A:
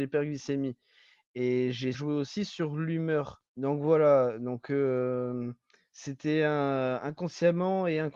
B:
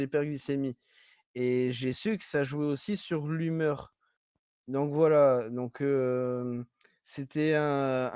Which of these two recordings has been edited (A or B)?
A